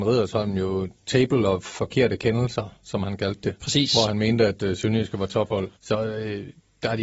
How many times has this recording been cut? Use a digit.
1